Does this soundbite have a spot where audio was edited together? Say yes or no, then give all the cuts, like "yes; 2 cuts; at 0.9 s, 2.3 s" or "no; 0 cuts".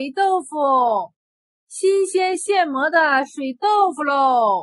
no; 0 cuts